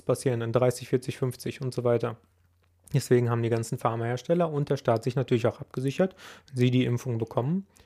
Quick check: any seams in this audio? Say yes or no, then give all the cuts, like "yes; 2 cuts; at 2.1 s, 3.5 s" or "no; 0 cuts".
no; 0 cuts